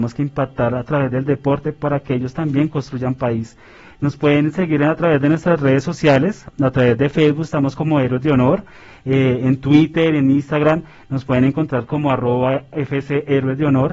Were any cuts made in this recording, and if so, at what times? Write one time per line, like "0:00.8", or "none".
none